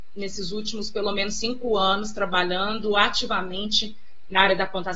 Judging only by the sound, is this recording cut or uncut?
uncut